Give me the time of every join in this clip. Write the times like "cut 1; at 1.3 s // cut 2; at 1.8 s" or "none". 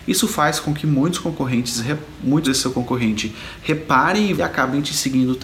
cut 1; at 2.4 s // cut 2; at 4.3 s